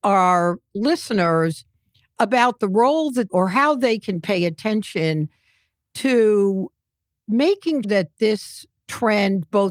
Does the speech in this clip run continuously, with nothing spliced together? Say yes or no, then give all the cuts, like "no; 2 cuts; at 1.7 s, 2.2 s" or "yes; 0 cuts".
no; 2 cuts; at 3.3 s, 7.8 s